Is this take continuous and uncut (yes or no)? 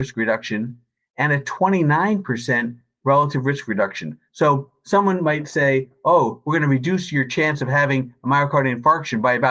yes